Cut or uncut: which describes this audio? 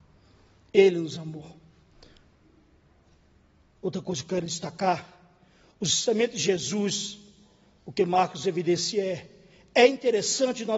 uncut